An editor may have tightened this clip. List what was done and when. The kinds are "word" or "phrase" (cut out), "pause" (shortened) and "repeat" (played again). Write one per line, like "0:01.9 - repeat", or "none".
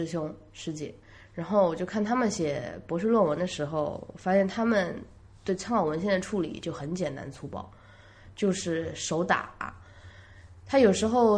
none